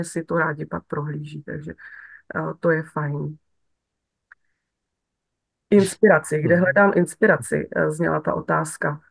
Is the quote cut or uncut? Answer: uncut